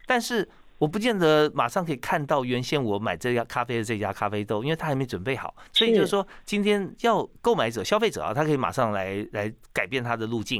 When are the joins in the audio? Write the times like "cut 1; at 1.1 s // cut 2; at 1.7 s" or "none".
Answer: cut 1; at 5.7 s